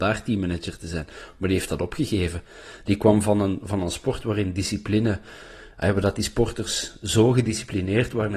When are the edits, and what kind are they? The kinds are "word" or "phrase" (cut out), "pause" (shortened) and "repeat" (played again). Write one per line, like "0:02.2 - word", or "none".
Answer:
none